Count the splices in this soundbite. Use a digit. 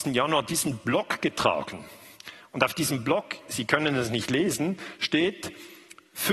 0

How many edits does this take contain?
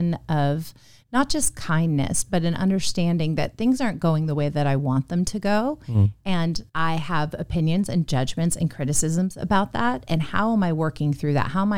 1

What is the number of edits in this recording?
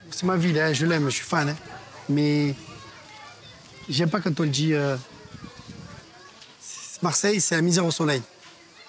0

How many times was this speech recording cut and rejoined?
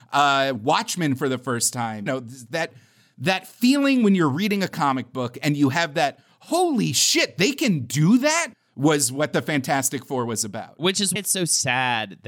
3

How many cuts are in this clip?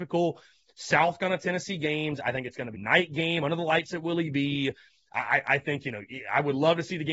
1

